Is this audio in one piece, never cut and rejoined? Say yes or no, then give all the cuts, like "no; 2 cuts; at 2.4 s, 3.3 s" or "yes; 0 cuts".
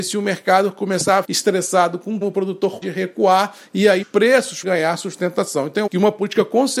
no; 6 cuts; at 1.2 s, 2.2 s, 2.8 s, 4.0 s, 4.6 s, 5.9 s